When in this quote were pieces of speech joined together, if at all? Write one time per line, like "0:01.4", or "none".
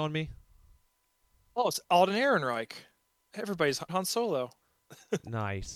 0:03.9